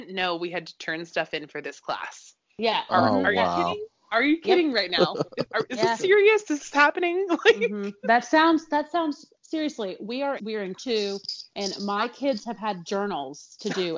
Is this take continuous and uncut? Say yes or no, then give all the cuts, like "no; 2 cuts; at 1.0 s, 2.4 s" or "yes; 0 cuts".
no; 4 cuts; at 9.4 s, 10.4 s, 10.7 s, 11.5 s